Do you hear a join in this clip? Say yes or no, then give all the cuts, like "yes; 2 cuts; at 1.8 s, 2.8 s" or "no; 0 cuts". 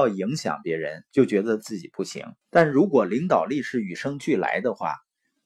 yes; 1 cut; at 2.4 s